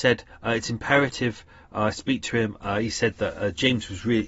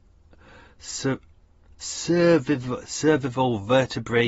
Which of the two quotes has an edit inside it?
second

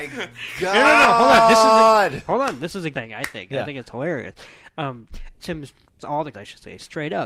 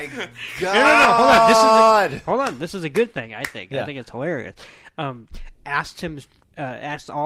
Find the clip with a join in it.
first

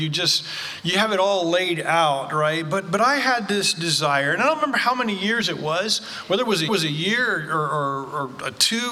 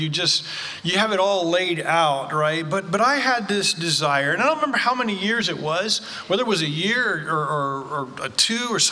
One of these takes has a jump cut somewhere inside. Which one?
first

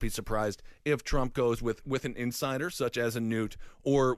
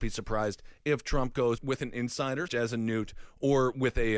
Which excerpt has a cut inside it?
second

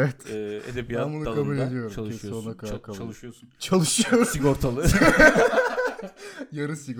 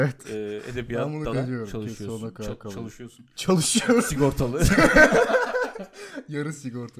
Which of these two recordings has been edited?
second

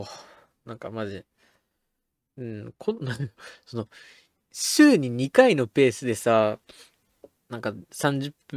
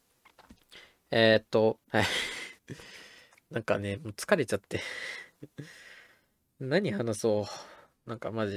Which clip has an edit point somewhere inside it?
second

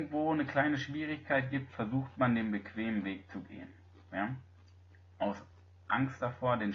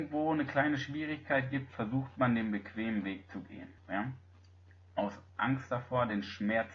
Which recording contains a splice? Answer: second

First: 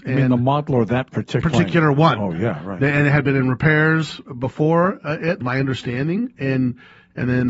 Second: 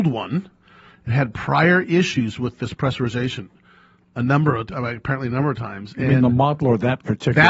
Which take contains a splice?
first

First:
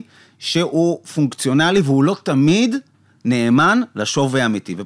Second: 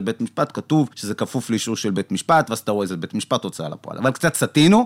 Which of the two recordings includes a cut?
second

